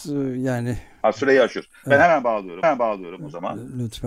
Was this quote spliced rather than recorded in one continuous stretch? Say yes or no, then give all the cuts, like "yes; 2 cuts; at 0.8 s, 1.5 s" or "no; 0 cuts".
yes; 1 cut; at 2.6 s